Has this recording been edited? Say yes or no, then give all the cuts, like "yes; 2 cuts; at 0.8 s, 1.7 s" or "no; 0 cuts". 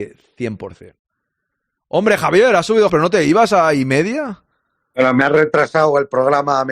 yes; 1 cut; at 2.9 s